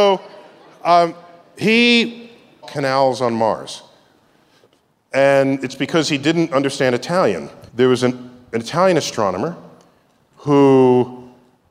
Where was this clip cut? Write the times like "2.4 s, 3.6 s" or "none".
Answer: 2.6 s, 7.7 s